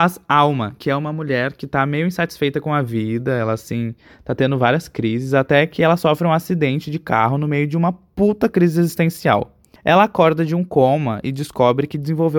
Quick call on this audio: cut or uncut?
uncut